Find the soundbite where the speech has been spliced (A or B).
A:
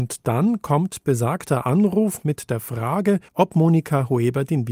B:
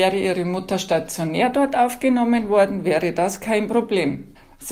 A